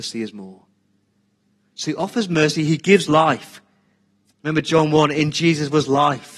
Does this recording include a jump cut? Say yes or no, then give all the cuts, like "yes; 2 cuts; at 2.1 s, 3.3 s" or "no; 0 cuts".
no; 0 cuts